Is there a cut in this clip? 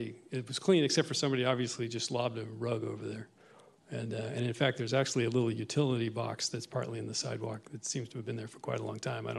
no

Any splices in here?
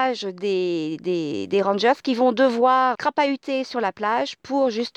yes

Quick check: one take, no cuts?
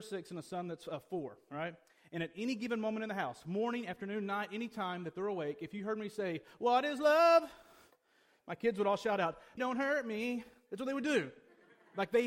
no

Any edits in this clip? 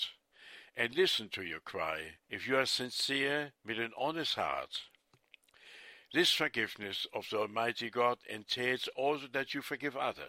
yes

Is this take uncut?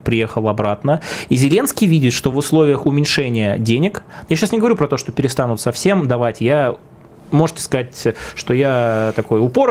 yes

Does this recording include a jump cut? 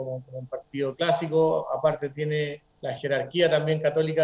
no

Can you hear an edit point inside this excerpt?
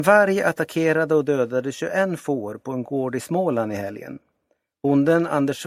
no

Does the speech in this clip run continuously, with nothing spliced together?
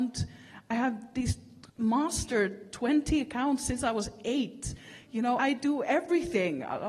no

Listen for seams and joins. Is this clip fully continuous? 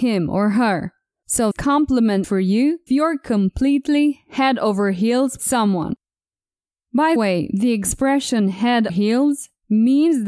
no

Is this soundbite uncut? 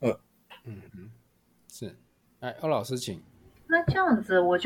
yes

